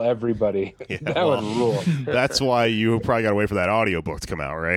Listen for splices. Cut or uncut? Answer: uncut